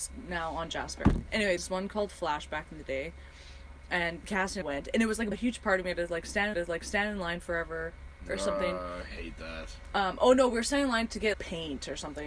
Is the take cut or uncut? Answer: cut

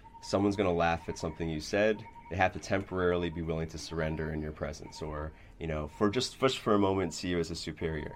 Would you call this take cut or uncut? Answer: uncut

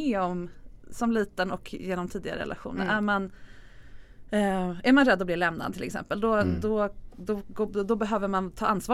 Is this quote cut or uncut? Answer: uncut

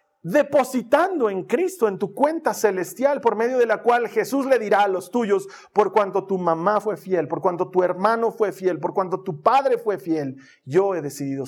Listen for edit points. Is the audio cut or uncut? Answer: uncut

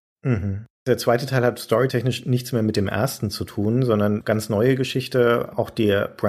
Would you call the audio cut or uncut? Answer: uncut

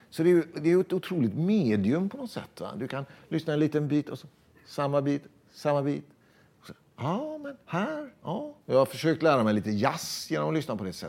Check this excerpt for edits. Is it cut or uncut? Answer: cut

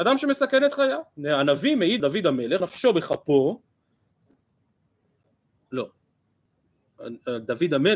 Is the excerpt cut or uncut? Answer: cut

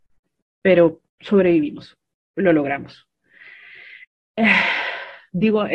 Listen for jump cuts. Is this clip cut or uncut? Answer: cut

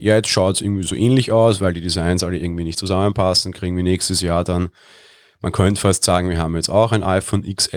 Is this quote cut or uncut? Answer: uncut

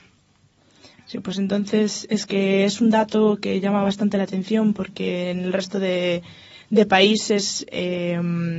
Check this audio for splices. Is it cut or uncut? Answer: uncut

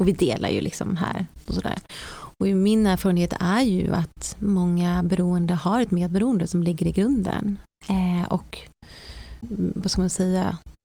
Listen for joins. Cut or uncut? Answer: cut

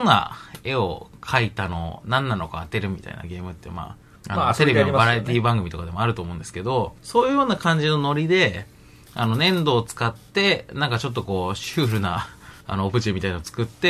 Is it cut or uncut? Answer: cut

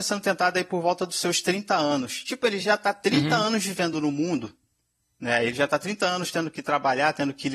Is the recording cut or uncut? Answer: uncut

